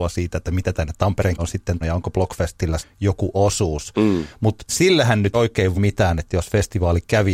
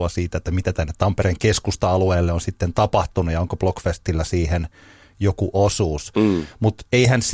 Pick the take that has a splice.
first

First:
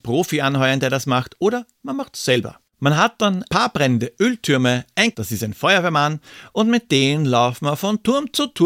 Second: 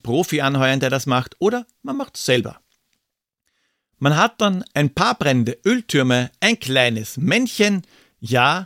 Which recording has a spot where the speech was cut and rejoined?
first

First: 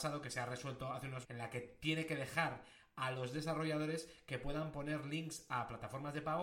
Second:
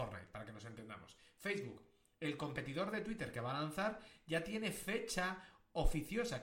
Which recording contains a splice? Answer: first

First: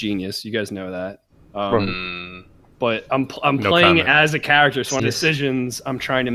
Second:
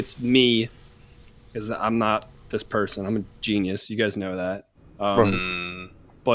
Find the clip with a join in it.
first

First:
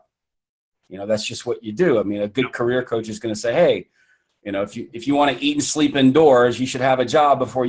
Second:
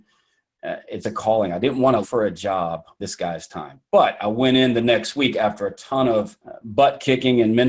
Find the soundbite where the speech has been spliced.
second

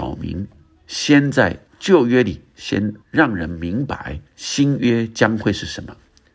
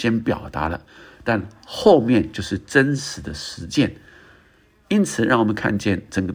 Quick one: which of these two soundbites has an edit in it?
first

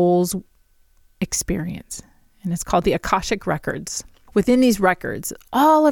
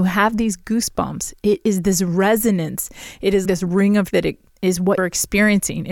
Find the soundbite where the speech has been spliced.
second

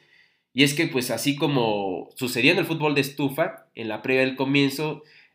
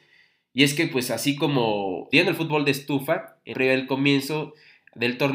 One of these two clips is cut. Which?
second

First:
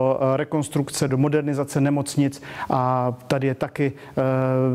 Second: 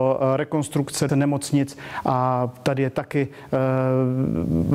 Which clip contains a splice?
second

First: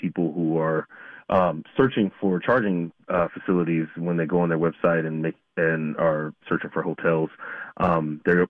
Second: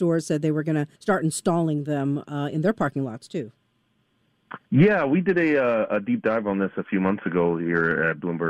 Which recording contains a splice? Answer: second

